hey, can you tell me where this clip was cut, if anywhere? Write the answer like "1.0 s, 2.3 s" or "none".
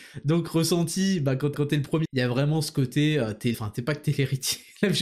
1.5 s, 2.0 s, 3.5 s